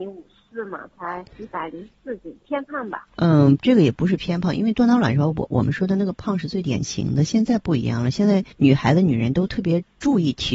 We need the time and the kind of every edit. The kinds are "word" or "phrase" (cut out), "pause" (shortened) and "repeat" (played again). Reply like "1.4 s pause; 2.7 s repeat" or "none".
1.3 s pause; 3.1 s pause; 8.5 s pause